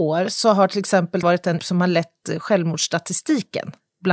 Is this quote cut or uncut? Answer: cut